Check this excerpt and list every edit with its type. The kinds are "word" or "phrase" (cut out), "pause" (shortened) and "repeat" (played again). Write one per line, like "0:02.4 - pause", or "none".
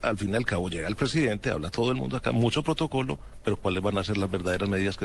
none